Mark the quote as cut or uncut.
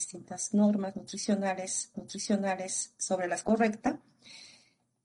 cut